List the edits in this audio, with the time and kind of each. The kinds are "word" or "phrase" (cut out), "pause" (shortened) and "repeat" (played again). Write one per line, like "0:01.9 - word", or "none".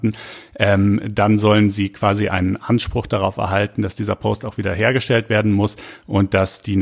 none